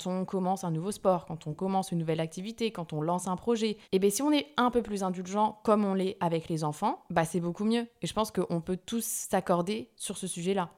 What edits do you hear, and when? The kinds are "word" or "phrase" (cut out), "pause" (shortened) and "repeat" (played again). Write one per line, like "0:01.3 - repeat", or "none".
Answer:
0:03.8 - pause